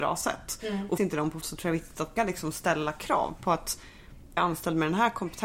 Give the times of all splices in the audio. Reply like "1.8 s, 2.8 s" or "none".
1.0 s, 1.4 s, 2.2 s, 4.4 s

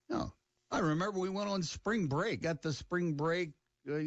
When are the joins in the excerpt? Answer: 2.4 s

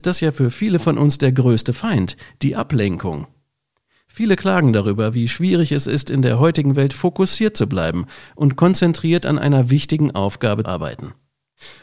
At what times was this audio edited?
10.6 s

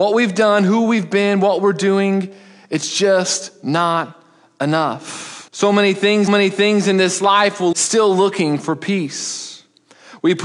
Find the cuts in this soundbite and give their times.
5.5 s, 6.3 s, 7.7 s

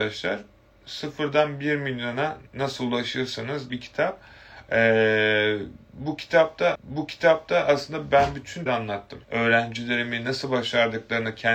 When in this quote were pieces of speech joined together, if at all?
2.5 s, 3.7 s, 6.7 s, 8.7 s, 9.2 s

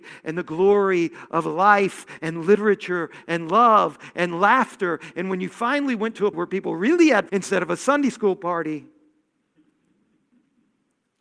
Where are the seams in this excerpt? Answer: 6.3 s, 7.3 s

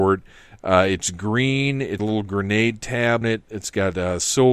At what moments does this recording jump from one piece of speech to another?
2.0 s, 3.2 s

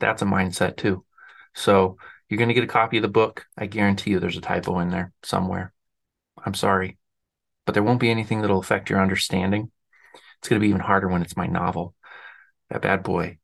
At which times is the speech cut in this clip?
3.5 s

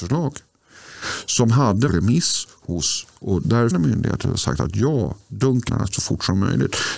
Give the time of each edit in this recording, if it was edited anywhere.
1.9 s, 3.7 s, 5.7 s

